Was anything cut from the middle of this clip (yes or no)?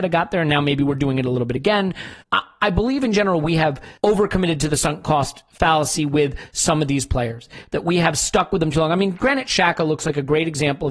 yes